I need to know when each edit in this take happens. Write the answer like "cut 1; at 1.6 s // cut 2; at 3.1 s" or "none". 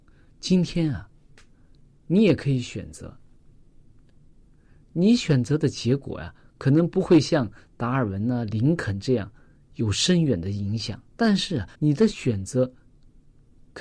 cut 1; at 11.1 s // cut 2; at 11.7 s